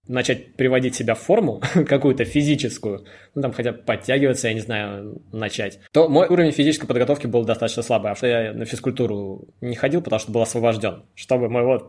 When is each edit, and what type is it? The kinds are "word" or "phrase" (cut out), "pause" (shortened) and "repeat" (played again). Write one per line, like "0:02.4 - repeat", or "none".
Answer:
0:05.9 - pause
0:06.3 - word
0:08.2 - word